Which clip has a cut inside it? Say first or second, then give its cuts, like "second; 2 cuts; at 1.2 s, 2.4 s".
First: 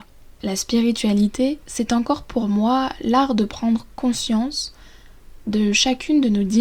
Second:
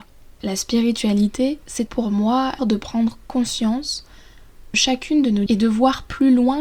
second; 4 cuts; at 1.9 s, 2.6 s, 4.7 s, 5.5 s